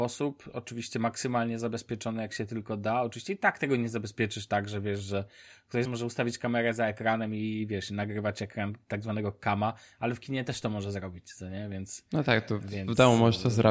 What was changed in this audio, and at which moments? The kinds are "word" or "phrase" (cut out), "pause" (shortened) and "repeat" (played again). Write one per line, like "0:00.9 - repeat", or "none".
0:05.8 - word